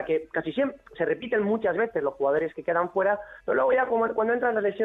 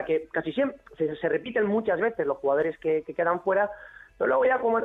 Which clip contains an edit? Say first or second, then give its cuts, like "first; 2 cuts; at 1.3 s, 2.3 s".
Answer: first; 3 cuts; at 1.0 s, 2.5 s, 3.4 s